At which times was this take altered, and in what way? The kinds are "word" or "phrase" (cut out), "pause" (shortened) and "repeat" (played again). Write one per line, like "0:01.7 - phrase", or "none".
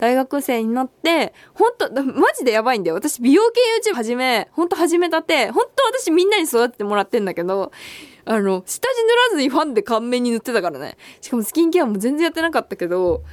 0:03.9 - word